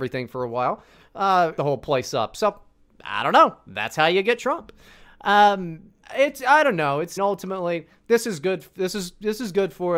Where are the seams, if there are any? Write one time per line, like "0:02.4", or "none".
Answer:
0:01.6
0:06.0
0:07.2